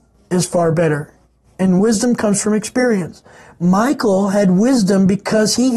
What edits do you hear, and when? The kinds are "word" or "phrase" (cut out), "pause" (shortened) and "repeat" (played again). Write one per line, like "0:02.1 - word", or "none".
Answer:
none